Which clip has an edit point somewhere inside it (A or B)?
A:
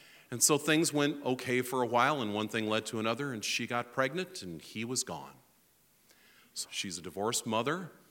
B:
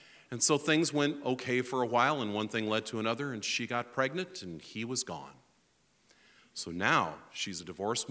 A